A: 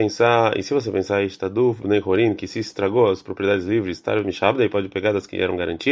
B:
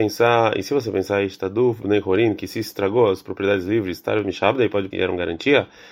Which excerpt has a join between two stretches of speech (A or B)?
B